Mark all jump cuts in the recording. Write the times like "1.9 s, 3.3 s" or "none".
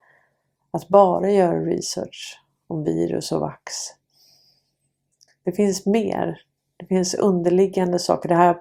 none